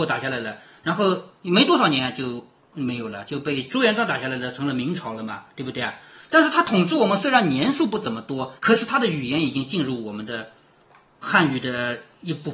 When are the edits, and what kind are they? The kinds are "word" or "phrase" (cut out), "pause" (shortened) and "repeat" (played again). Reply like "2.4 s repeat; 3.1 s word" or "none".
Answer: 8.6 s pause